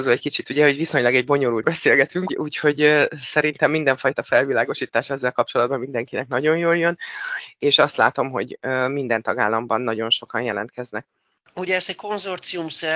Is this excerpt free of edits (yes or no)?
no